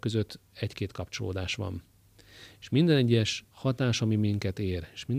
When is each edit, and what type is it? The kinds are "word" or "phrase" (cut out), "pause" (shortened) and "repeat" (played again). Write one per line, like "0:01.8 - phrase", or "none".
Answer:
0:03.5 - pause